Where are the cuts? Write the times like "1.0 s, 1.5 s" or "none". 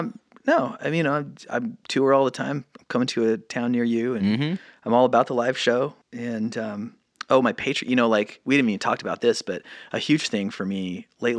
6.0 s